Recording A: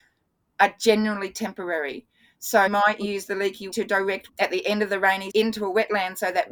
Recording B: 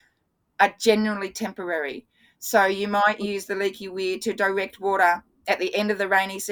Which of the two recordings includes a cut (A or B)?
A